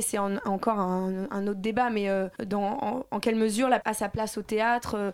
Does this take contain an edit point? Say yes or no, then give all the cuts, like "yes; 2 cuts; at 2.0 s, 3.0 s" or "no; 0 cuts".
yes; 2 cuts; at 2.4 s, 3.8 s